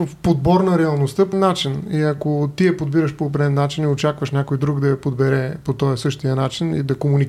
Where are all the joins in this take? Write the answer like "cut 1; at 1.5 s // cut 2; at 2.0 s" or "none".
cut 1; at 1.3 s